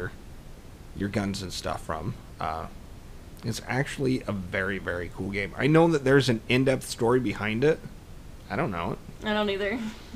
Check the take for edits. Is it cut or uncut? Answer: uncut